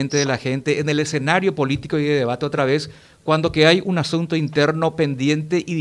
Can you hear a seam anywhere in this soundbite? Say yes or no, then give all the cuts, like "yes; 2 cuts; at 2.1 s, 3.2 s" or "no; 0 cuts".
no; 0 cuts